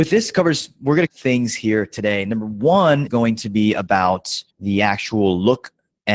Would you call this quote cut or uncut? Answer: cut